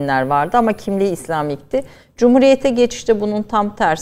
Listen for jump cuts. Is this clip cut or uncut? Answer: uncut